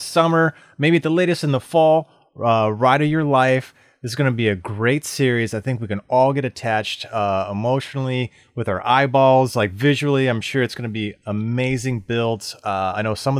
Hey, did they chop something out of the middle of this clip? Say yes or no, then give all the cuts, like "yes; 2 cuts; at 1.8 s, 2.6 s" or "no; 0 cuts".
no; 0 cuts